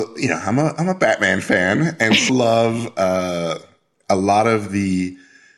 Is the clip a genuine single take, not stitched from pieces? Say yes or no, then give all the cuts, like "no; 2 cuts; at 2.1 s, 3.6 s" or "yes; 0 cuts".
no; 1 cut; at 2.3 s